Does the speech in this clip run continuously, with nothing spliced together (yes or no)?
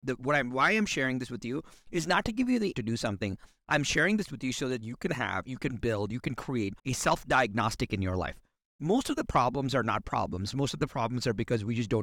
no